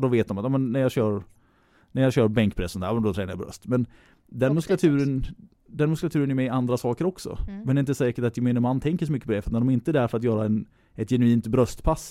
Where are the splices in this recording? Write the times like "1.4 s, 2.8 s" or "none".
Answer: none